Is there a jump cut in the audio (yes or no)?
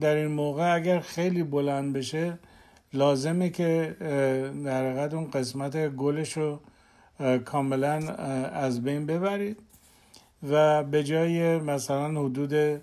no